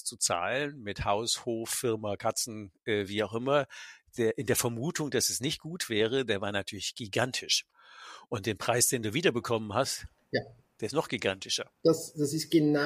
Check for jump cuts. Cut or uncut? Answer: uncut